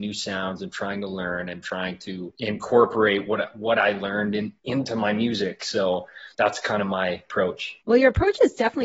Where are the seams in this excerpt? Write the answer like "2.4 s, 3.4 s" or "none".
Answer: 4.6 s, 6.3 s, 7.8 s